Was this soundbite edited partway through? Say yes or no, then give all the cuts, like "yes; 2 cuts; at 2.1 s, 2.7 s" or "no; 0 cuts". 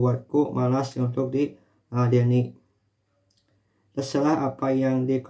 no; 0 cuts